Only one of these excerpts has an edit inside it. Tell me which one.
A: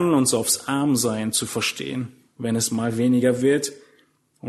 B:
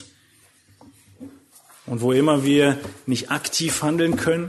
B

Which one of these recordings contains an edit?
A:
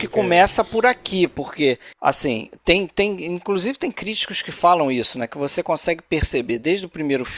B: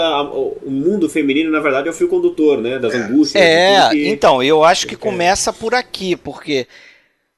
A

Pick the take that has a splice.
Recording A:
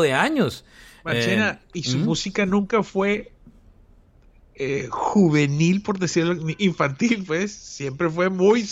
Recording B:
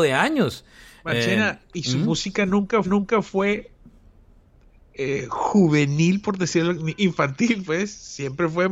B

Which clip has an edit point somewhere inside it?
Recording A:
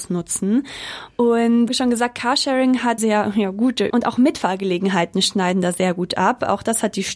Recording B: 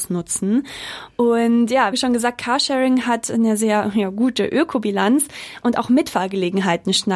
A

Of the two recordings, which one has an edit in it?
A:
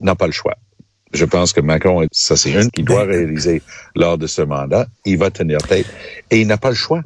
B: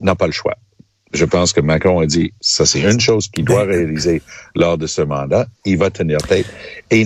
A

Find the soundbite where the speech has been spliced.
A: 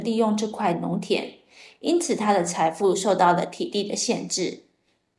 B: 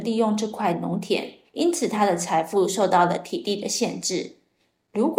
B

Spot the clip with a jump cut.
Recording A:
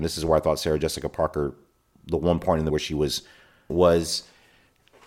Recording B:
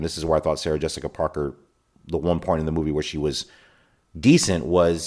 A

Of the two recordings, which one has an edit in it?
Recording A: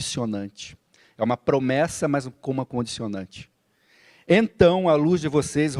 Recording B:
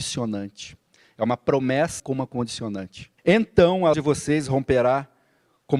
B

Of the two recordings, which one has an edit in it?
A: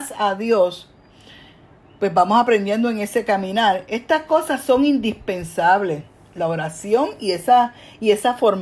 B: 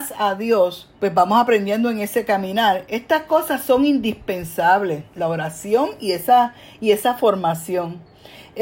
B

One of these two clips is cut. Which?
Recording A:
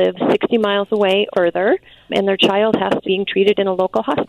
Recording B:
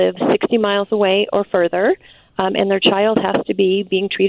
A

